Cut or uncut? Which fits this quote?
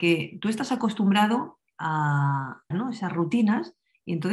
cut